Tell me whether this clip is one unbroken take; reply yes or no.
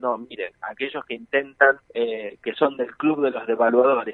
no